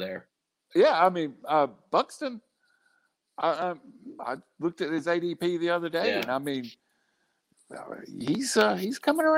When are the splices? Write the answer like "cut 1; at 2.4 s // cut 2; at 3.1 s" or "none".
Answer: none